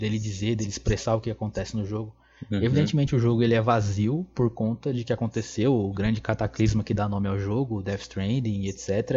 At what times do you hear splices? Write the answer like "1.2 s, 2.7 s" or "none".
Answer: none